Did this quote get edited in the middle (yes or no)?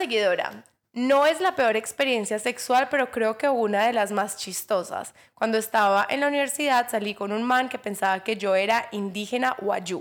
no